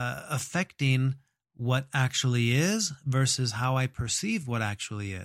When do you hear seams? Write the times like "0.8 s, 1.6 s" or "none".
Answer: none